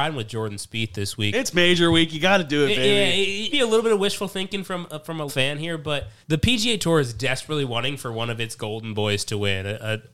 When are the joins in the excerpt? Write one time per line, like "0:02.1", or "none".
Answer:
0:03.5
0:05.3
0:06.2